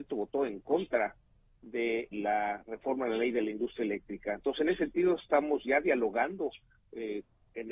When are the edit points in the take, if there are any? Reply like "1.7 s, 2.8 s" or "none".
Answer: 2.1 s

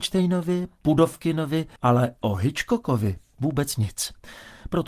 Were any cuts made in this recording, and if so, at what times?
1.8 s

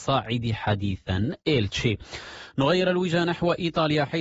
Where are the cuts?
none

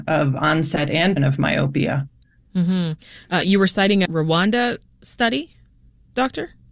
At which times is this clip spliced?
1.2 s, 4.1 s

